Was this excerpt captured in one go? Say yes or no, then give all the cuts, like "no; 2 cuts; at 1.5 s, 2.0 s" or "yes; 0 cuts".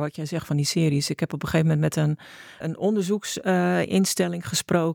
no; 1 cut; at 2.6 s